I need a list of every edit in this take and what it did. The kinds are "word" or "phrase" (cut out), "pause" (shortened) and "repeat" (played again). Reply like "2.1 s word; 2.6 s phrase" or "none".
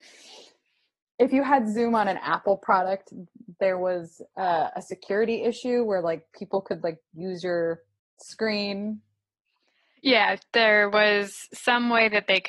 none